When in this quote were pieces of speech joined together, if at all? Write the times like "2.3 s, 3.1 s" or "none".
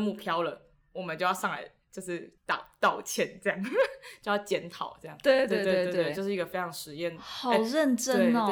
2.4 s